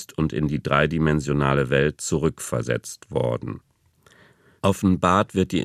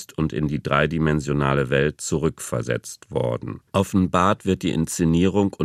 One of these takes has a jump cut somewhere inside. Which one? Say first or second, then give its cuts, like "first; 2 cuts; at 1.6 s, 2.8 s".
second; 1 cut; at 3.7 s